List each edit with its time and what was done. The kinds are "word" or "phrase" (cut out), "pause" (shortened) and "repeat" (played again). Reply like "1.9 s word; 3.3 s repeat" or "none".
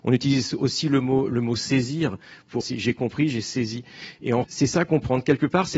2.6 s word; 4.4 s phrase

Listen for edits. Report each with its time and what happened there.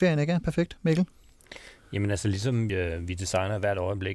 2.7 s word

